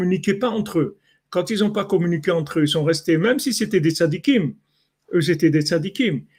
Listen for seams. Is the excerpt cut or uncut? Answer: uncut